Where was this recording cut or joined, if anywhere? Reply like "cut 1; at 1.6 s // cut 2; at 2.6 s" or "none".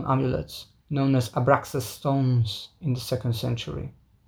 none

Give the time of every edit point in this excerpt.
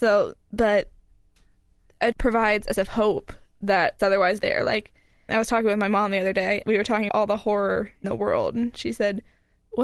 cut 1; at 2.1 s // cut 2; at 2.8 s // cut 3; at 4.0 s // cut 4; at 4.4 s // cut 5; at 5.3 s // cut 6; at 6.6 s // cut 7; at 7.1 s // cut 8; at 8.0 s

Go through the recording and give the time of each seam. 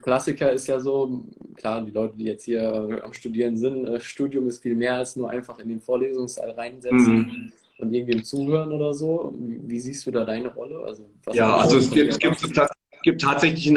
none

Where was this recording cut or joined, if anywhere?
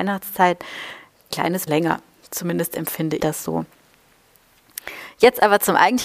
cut 1; at 1.3 s // cut 2; at 1.7 s // cut 3; at 3.2 s

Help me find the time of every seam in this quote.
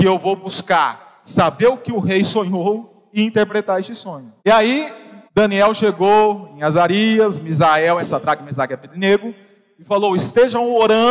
cut 1; at 4.4 s // cut 2; at 5.3 s // cut 3; at 8.0 s

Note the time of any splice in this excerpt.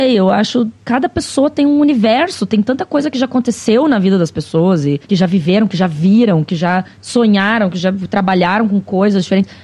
cut 1; at 5.0 s // cut 2; at 6.9 s

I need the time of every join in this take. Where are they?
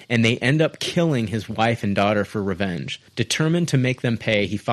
cut 1; at 3.1 s

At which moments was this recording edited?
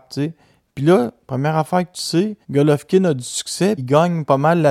cut 1; at 2.4 s // cut 2; at 3.8 s

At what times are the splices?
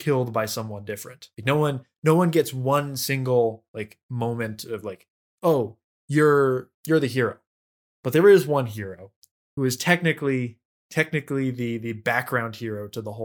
cut 1; at 1.3 s // cut 2; at 6.8 s // cut 3; at 9.6 s

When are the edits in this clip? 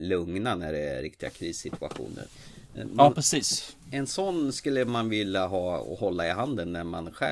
none

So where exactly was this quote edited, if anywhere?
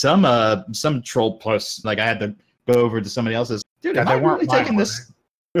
cut 1; at 1.8 s // cut 2; at 3.6 s

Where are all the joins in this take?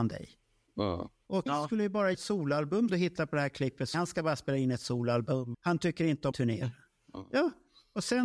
cut 1; at 1.5 s // cut 2; at 2.1 s // cut 3; at 2.9 s // cut 4; at 3.9 s // cut 5; at 5.5 s // cut 6; at 6.3 s

